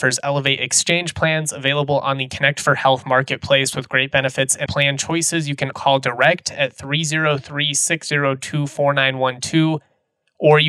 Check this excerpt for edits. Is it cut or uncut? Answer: cut